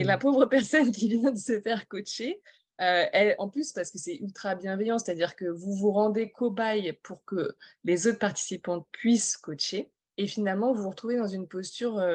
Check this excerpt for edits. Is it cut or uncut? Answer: uncut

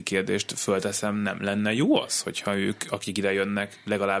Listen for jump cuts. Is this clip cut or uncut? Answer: uncut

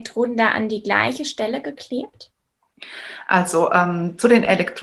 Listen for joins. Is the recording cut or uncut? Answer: uncut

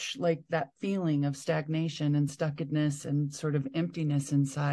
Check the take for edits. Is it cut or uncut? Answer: uncut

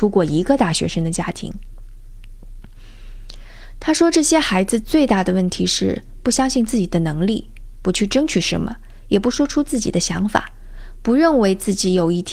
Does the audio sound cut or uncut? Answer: cut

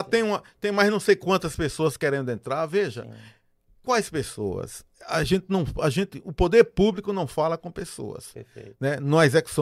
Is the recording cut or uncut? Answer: uncut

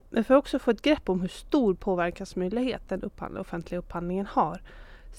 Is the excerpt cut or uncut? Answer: uncut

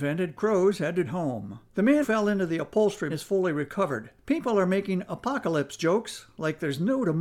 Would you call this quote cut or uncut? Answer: cut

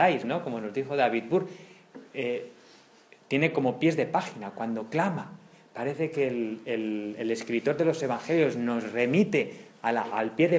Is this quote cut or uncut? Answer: uncut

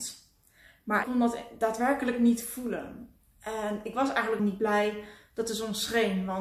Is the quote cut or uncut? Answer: cut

